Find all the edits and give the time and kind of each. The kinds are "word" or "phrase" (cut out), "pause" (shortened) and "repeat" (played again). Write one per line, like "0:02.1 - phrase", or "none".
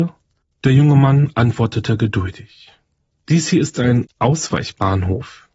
0:03.1 - pause